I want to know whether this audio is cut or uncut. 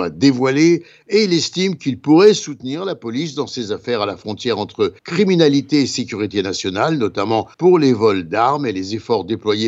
cut